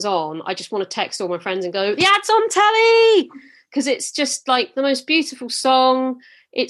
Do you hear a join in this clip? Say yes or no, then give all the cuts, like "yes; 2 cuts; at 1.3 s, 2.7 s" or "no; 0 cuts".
no; 0 cuts